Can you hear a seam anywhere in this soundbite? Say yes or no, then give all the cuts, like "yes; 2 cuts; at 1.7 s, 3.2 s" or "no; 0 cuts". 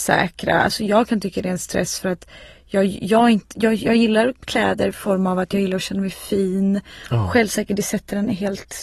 no; 0 cuts